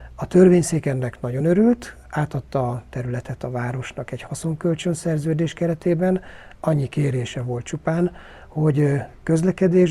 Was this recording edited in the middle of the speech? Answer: no; 0 cuts

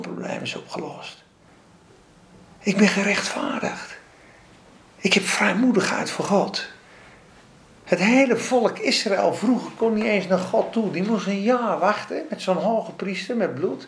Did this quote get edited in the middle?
no; 0 cuts

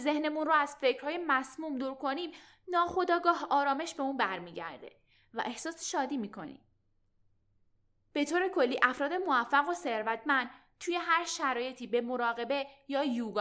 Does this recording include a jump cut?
no; 0 cuts

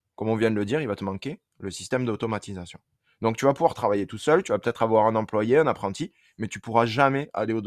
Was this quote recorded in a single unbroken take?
yes; 0 cuts

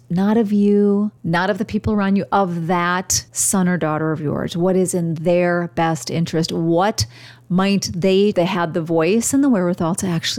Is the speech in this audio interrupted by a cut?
yes; 3 cuts; at 1.2 s, 3.3 s, 8.3 s

